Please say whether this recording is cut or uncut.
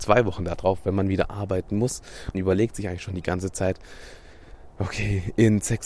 cut